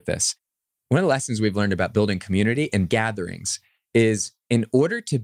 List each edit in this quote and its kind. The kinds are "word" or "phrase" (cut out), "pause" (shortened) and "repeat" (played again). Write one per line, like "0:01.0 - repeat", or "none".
0:02.9 - phrase